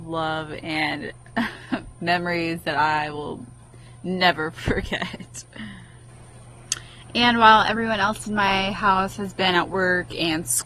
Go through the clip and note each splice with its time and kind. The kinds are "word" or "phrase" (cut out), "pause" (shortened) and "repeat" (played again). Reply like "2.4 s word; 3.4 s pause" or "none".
none

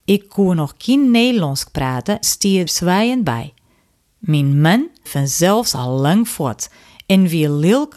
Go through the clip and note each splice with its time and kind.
2.2 s word; 2.7 s word; 5.1 s word

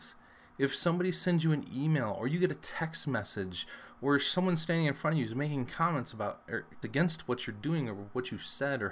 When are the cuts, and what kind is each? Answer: 6.8 s word

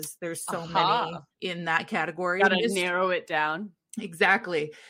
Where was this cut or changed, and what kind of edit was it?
1.3 s pause

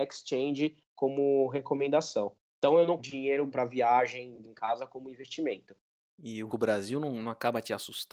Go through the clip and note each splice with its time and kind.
3.0 s word; 3.5 s word; 4.4 s word; 6.5 s word

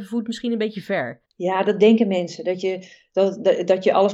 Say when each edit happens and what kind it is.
1.3 s pause

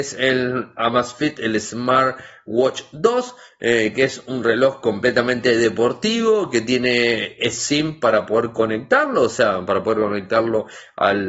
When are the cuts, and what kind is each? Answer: none

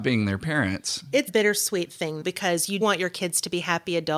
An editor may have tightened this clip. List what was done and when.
1.3 s word; 2.2 s word; 2.8 s word

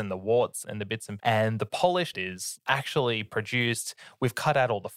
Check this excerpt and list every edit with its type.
1.2 s word; 2.1 s phrase; 3.3 s word

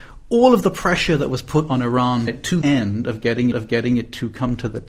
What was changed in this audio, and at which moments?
2.3 s phrase; 2.6 s word; 3.5 s repeat

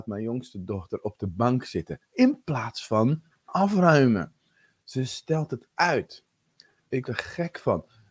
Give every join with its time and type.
2.0 s pause; 7.1 s word

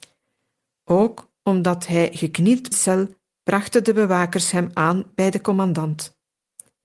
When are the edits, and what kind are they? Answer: 2.7 s phrase

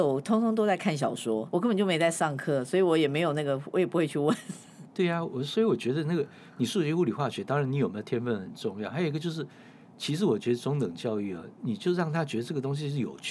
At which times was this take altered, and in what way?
1.5 s word

